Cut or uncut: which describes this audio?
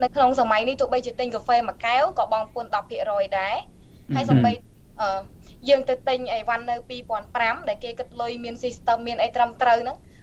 uncut